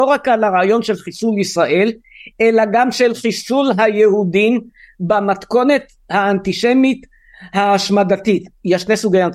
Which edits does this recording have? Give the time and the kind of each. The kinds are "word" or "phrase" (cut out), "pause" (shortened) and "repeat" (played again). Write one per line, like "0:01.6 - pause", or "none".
none